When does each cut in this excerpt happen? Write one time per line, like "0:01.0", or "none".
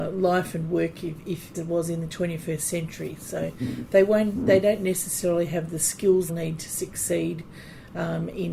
0:01.5
0:06.3